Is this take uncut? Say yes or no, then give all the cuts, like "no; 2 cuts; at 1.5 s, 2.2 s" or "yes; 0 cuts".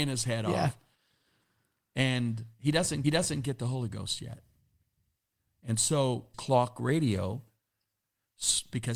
no; 2 cuts; at 3.0 s, 6.3 s